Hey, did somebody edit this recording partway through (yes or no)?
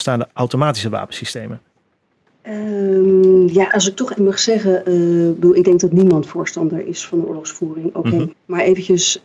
yes